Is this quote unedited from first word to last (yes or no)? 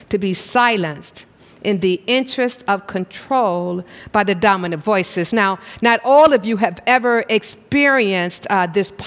yes